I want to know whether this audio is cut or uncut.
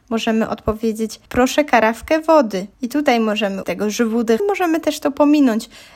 cut